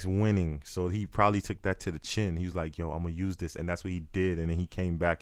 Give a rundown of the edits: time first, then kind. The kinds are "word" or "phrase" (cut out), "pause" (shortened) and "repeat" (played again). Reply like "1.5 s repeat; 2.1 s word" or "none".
none